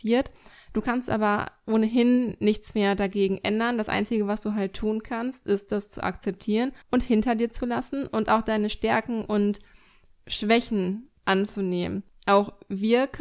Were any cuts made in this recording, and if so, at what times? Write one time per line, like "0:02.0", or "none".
0:06.8
0:11.2